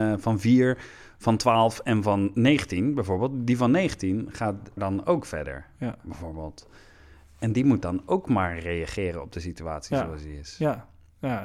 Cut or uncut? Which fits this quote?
cut